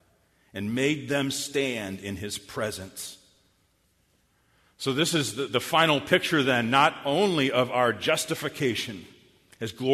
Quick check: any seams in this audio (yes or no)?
no